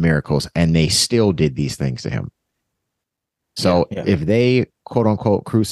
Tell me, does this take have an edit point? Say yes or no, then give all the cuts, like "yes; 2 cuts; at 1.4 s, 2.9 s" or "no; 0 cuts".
no; 0 cuts